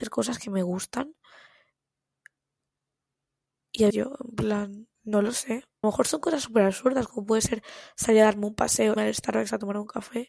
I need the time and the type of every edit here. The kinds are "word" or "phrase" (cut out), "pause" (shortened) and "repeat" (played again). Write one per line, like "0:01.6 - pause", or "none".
0:03.9 - word
0:04.9 - pause
0:05.8 - phrase
0:09.0 - word

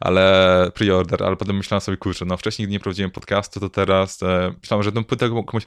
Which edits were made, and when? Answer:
none

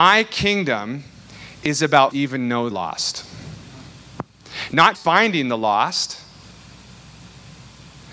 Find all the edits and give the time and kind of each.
0:02.1 - phrase
0:02.7 - word
0:04.9 - word

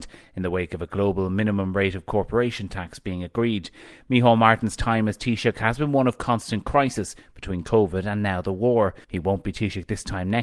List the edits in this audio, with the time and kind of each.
0:09.0 - pause

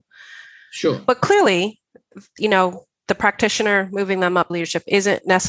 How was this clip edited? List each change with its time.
0:04.5 - word

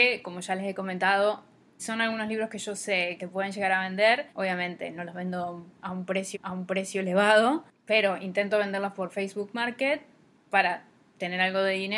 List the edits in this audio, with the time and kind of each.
0:01.8 - word
0:03.2 - word
0:04.3 - pause
0:06.3 - repeat

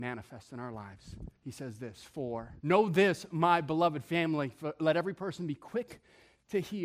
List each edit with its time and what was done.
0:01.4 - pause
0:02.6 - pause

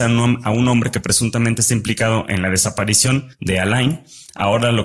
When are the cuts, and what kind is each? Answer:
0:03.3 - pause

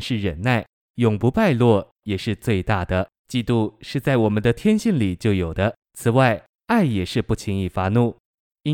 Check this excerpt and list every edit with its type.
0:03.2 - pause
0:05.8 - pause

